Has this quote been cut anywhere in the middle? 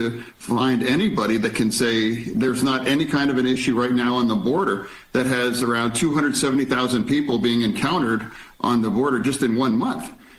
no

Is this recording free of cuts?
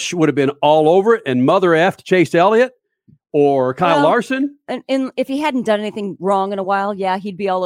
yes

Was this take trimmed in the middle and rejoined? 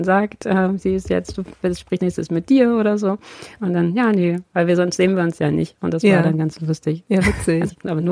yes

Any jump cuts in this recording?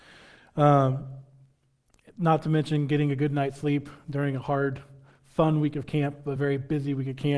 no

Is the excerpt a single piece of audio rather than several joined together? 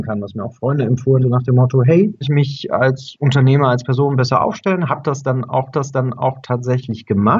no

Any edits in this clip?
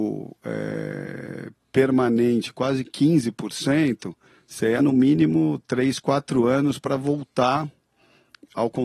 yes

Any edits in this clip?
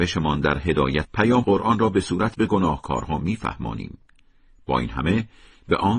yes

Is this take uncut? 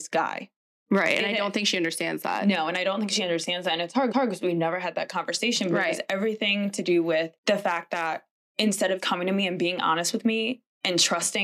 no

